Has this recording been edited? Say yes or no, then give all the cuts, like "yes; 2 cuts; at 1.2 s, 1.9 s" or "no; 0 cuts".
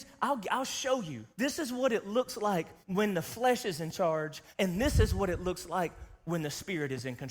yes; 3 cuts; at 1.3 s, 2.8 s, 4.5 s